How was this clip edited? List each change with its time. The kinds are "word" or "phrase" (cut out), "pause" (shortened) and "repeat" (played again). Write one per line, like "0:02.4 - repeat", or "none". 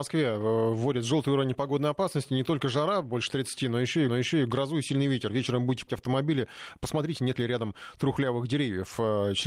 0:04.1 - repeat
0:05.9 - word